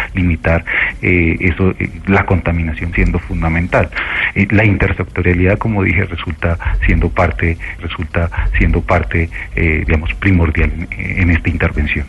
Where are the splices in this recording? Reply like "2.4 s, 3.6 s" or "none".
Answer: 2.9 s, 7.8 s